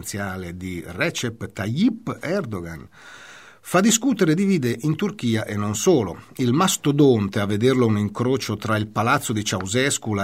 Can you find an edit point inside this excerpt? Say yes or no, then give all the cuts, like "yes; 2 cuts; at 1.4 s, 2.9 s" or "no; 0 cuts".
no; 0 cuts